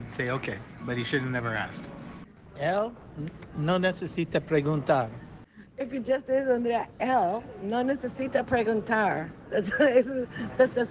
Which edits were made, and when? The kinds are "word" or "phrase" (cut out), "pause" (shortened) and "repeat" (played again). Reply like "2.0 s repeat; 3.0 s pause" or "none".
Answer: none

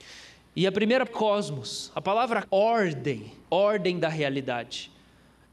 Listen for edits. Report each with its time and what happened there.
1.1 s word; 2.4 s phrase; 3.4 s pause

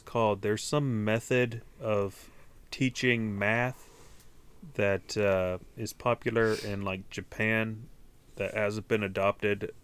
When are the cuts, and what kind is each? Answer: none

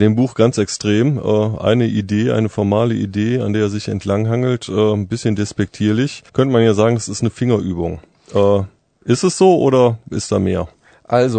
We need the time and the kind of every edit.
6.3 s pause

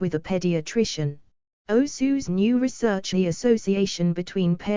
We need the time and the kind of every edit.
1.5 s pause; 3.1 s word

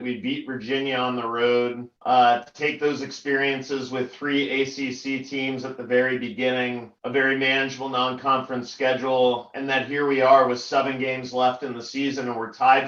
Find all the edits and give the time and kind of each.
2.0 s pause; 7.0 s pause

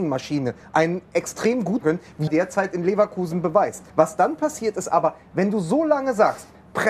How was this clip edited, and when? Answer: 1.8 s phrase; 2.3 s phrase; 3.9 s pause

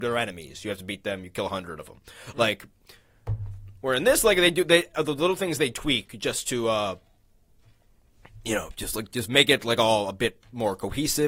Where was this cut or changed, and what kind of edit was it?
3.8 s pause

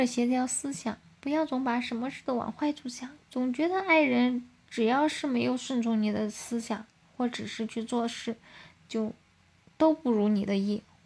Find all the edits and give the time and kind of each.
3.2 s pause

